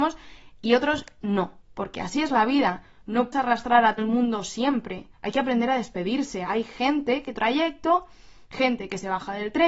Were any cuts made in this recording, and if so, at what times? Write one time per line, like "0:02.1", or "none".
0:01.6
0:03.3
0:04.0
0:05.1
0:07.4